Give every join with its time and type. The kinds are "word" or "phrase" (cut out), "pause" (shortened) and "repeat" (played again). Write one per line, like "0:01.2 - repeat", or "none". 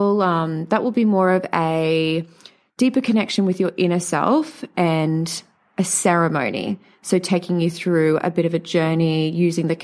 none